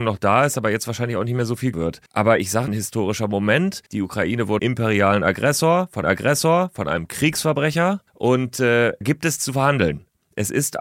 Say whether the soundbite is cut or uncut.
cut